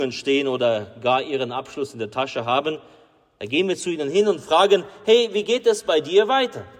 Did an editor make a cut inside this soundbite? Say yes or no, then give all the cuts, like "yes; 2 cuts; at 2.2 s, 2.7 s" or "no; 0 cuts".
no; 0 cuts